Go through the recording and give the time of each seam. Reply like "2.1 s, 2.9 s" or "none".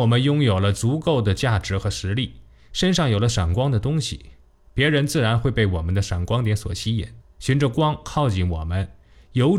7.2 s